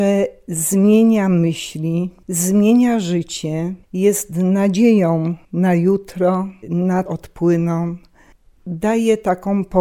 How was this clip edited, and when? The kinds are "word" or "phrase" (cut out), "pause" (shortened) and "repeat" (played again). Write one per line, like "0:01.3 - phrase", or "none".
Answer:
0:02.2 - pause
0:03.8 - pause
0:05.4 - pause
0:06.6 - word
0:07.1 - phrase